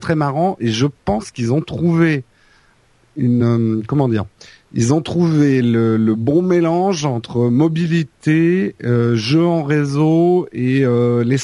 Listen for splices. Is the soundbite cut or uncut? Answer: uncut